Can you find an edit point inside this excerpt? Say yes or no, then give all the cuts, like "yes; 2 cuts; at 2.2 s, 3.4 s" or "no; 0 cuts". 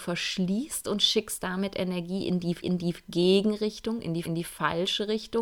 yes; 2 cuts; at 2.6 s, 4.2 s